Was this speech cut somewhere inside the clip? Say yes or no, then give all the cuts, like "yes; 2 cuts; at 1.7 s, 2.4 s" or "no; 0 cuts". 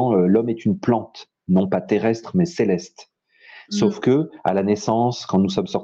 no; 0 cuts